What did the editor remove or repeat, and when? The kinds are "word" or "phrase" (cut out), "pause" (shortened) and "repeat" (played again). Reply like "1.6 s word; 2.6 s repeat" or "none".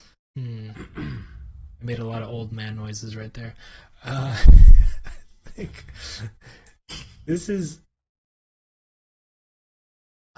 none